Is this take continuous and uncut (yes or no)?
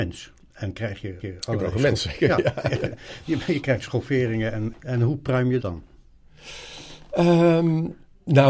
no